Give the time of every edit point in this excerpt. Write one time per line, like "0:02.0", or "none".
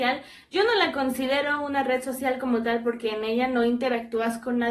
none